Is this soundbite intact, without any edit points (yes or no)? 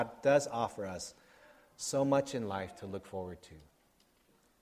yes